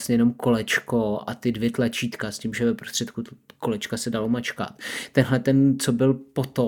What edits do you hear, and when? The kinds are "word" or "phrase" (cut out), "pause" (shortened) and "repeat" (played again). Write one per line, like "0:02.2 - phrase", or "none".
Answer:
none